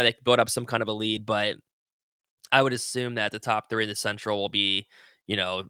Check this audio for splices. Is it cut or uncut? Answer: uncut